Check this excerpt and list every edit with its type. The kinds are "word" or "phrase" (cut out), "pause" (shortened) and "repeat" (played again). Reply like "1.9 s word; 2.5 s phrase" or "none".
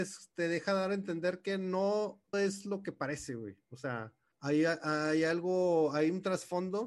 2.3 s word; 4.3 s pause